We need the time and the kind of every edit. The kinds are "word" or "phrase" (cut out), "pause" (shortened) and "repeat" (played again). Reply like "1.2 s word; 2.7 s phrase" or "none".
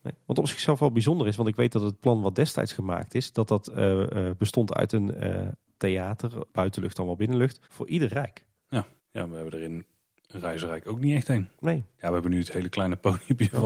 5.8 s word; 7.6 s pause; 9.0 s pause